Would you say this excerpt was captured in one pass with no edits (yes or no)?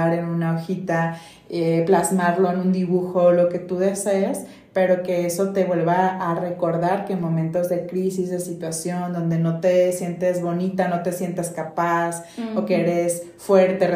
yes